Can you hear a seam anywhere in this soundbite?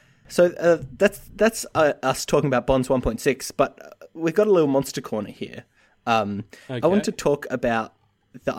no; 0 cuts

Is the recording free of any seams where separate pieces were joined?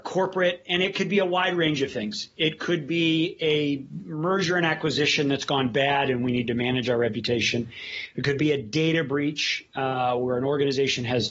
yes; 0 cuts

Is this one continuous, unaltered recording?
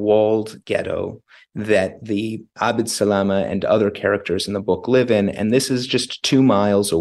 yes; 0 cuts

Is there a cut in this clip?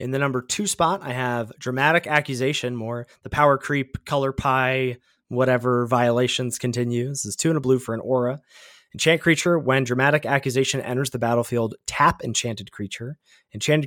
no; 0 cuts

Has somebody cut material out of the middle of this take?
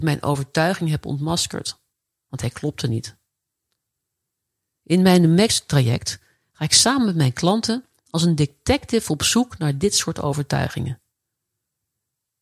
no; 0 cuts

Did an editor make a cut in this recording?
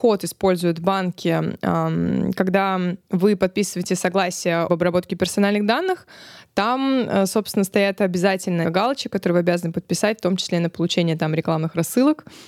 yes; 2 cuts; at 4.7 s, 8.6 s

